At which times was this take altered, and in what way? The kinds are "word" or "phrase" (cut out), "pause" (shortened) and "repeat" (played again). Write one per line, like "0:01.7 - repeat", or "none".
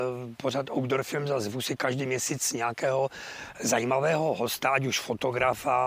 none